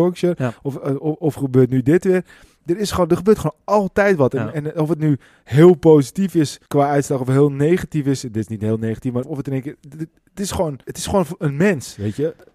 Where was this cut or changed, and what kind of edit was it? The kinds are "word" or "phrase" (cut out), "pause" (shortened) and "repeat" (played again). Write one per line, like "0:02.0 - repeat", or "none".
0:06.7 - pause
0:09.2 - word
0:10.8 - pause